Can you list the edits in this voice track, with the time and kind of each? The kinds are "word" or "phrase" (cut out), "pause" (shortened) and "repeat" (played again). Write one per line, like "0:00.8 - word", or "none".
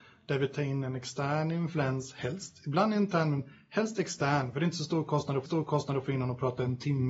0:05.5 - repeat

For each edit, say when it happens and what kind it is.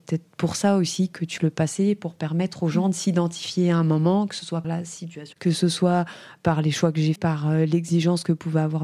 0:01.4 - word
0:04.6 - word
0:05.3 - word
0:07.2 - word

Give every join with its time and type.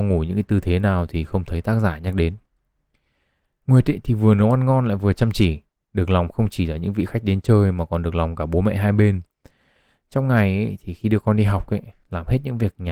none

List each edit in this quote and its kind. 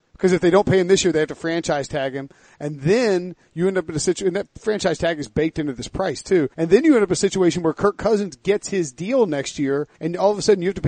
0:06.5 - pause
0:09.9 - pause

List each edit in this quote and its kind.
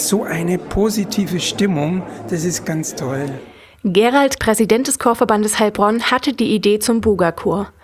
0:02.6 - word
0:04.4 - word

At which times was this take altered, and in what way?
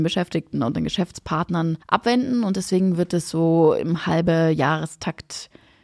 0:01.8 - pause

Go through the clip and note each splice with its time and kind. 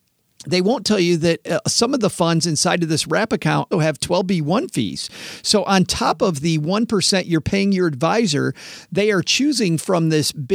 0:03.7 - word

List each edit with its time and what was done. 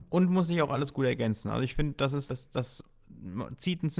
0:02.3 - word

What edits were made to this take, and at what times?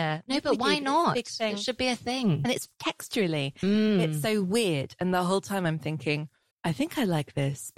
0:06.5 - pause

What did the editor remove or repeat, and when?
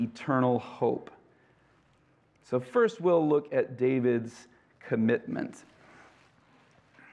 none

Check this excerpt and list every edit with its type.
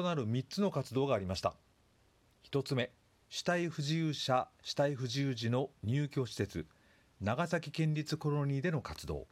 0:03.0 - pause

